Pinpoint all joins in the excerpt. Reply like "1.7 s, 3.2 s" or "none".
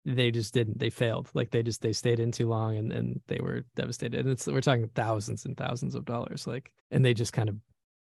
6.8 s

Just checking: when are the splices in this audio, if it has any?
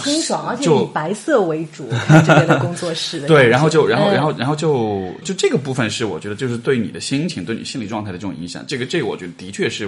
5.2 s

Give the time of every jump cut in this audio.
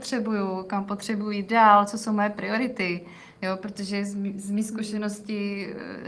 none

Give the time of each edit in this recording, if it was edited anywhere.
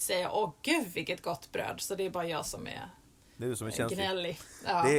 none

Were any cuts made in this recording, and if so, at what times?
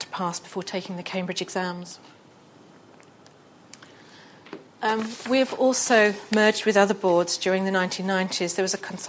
4.7 s

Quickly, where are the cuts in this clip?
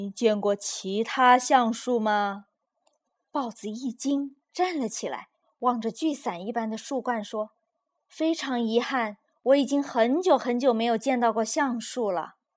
2.7 s, 5.4 s, 7.5 s

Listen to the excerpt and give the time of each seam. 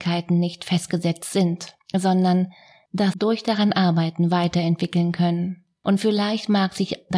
none

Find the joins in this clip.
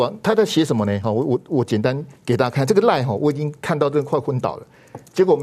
2.2 s

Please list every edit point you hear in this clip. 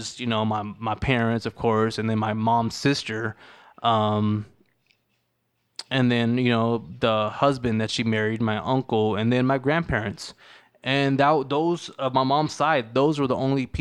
none

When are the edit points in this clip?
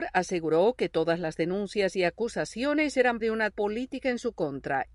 3.2 s, 3.5 s

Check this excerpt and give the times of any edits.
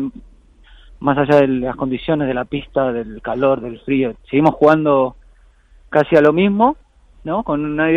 4.1 s

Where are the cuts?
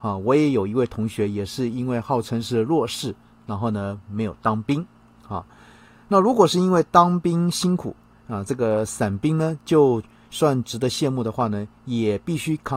none

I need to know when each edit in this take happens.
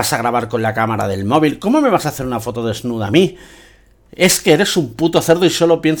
none

